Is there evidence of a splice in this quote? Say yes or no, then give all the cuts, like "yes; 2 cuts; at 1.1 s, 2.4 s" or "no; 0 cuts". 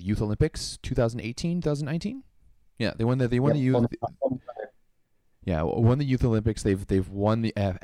no; 0 cuts